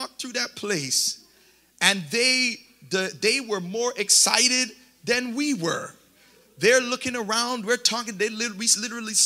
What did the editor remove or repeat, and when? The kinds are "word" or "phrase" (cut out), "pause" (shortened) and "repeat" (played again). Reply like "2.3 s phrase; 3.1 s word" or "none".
none

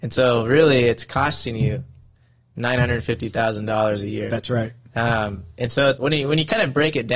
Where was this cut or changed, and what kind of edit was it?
5.5 s pause; 6.0 s word

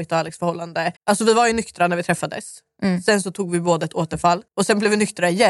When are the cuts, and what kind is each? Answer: 1.0 s pause; 4.5 s pause

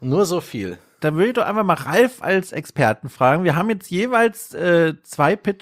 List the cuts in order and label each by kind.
none

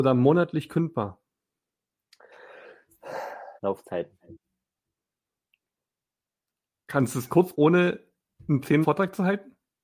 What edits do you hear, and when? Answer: 3.6 s pause; 7.5 s word; 8.8 s word

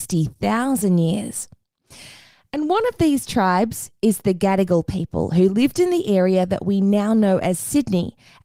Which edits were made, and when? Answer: none

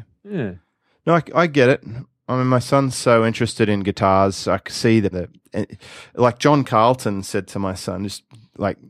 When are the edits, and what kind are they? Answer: 5.1 s phrase

